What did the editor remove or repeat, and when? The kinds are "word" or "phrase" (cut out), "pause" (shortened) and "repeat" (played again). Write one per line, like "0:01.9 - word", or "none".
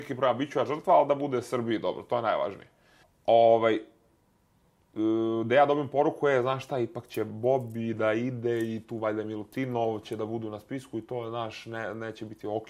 0:03.0 - pause

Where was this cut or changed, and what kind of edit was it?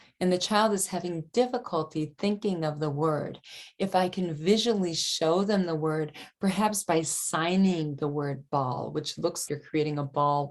0:09.5 - word

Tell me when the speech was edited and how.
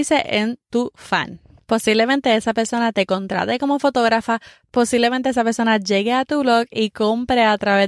none

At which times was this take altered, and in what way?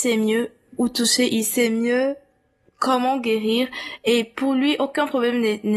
none

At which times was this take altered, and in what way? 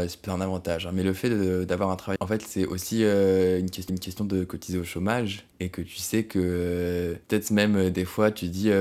0:02.2 - word
0:03.9 - repeat
0:05.5 - pause
0:07.2 - pause

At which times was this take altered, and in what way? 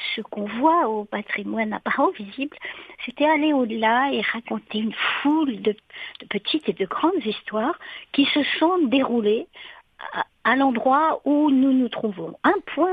none

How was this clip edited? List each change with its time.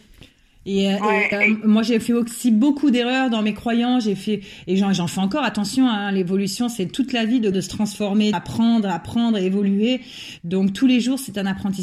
0:01.3 - word
0:07.5 - word
0:08.3 - word

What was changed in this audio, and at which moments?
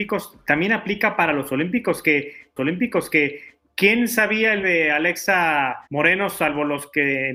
0:02.6 - repeat
0:04.6 - word
0:05.9 - pause

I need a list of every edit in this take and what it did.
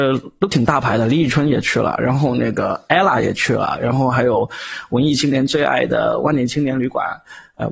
none

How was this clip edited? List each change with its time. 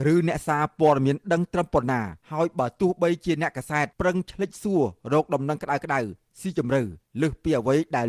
0:02.2 - pause
0:03.9 - pause

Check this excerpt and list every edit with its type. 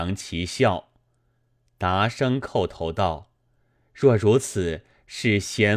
none

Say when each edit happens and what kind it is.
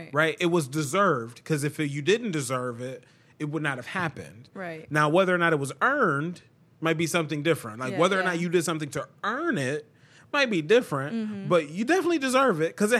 none

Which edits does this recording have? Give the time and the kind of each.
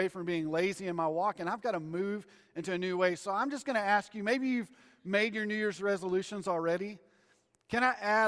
none

